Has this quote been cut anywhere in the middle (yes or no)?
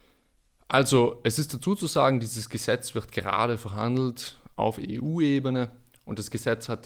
no